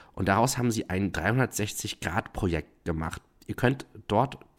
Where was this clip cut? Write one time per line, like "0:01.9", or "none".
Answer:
none